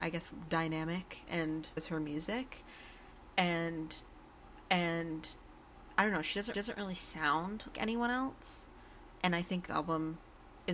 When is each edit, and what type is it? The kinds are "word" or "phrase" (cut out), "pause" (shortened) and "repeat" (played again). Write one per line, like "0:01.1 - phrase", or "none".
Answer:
0:01.8 - word
0:04.6 - repeat
0:06.5 - repeat
0:07.7 - word
0:09.7 - word